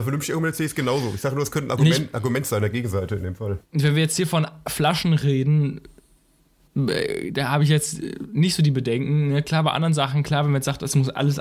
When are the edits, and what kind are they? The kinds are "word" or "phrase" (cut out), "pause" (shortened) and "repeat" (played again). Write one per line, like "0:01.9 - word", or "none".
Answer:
none

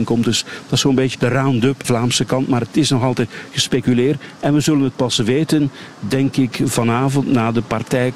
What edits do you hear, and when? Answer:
0:01.1 - word
0:01.8 - word

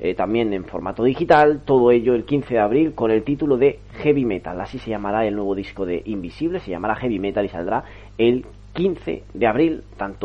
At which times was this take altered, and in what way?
none

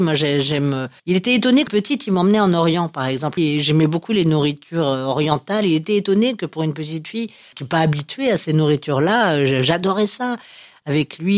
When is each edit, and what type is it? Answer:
0:01.0 - pause
0:01.7 - word
0:03.4 - phrase
0:07.5 - word

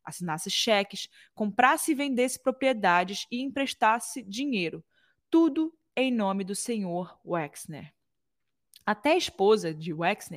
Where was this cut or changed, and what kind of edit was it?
none

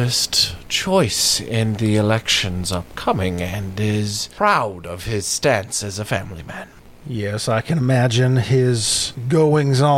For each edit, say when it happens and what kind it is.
none

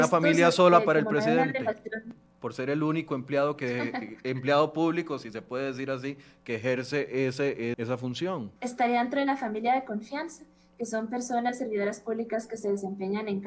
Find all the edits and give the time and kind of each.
0:07.7 - word
0:08.6 - pause

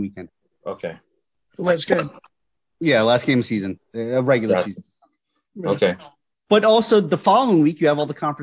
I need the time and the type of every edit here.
none

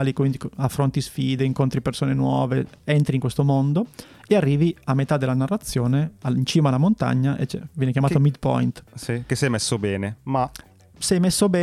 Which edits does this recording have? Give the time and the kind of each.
none

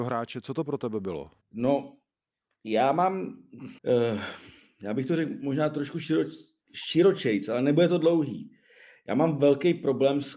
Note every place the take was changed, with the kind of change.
0:01.4 - pause
0:03.8 - pause

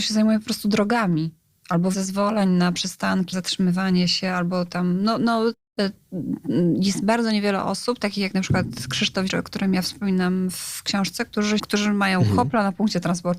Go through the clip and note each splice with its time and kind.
0:01.9 - word
0:03.3 - word
0:09.3 - word
0:11.6 - word

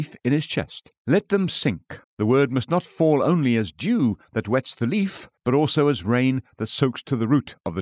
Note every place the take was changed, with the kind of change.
0:01.0 - pause
0:02.0 - pause
0:05.4 - pause

